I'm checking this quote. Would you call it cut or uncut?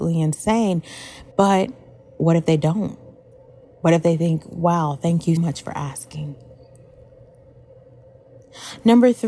cut